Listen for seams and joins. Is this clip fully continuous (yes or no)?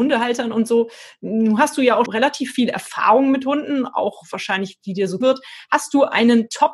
no